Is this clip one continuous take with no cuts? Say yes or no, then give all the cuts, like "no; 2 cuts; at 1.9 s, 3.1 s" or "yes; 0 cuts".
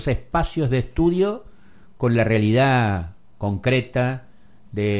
yes; 0 cuts